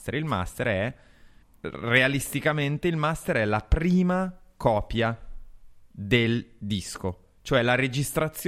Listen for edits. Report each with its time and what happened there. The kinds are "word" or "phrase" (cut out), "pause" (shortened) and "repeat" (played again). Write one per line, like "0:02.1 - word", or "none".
0:01.4 - pause
0:05.9 - pause